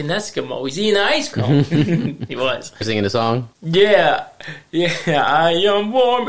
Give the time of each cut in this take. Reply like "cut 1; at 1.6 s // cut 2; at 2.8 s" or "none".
cut 1; at 1.3 s // cut 2; at 2.8 s // cut 3; at 3.5 s